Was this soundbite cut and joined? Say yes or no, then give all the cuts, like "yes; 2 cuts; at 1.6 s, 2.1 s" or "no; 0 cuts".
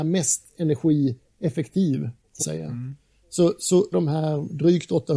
yes; 2 cuts; at 2.4 s, 3.9 s